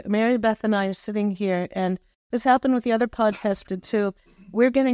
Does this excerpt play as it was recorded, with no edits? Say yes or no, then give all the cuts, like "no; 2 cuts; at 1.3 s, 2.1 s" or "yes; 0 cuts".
no; 1 cut; at 3.7 s